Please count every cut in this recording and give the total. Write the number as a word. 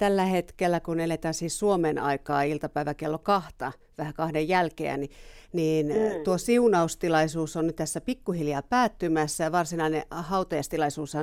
zero